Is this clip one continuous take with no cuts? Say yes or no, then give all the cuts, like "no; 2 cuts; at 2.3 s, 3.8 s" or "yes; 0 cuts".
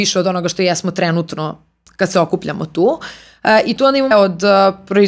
no; 1 cut; at 4.1 s